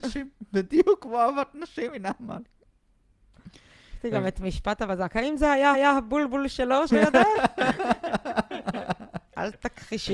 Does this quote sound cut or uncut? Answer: cut